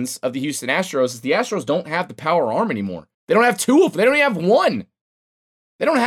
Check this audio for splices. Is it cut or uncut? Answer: cut